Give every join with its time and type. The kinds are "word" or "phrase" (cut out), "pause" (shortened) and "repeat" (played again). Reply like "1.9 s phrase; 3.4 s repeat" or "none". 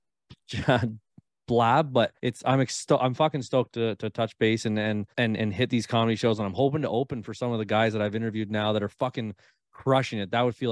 2.2 s pause; 5.1 s pause